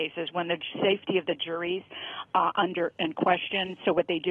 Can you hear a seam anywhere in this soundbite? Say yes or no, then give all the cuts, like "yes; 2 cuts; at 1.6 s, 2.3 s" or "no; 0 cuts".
no; 0 cuts